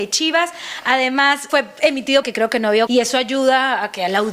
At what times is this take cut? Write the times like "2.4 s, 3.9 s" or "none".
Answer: 1.5 s, 2.2 s, 2.9 s